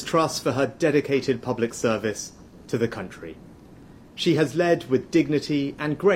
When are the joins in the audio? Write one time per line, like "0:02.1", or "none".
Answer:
none